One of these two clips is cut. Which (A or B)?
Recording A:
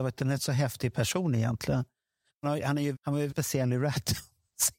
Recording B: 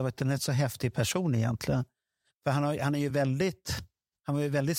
A